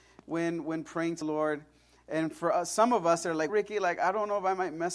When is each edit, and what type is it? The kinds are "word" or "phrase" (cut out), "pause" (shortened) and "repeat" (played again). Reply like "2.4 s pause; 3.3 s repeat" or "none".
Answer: 1.2 s word; 3.5 s word